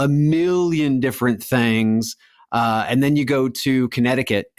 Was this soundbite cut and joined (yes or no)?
no